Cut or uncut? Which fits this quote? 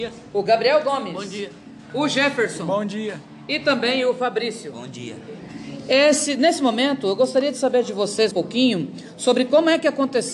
cut